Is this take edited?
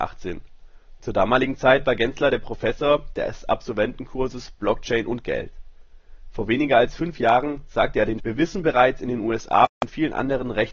yes; 1 cut; at 8.2 s

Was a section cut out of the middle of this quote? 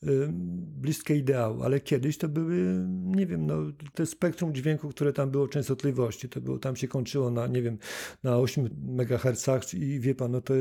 yes; 1 cut; at 3.9 s

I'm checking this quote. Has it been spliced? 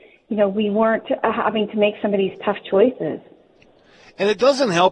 no; 0 cuts

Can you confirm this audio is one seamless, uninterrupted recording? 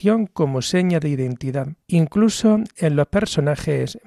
no; 1 cut; at 1.8 s

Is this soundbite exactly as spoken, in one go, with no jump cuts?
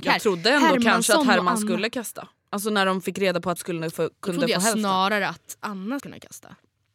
no; 2 cuts; at 3.6 s, 6.0 s

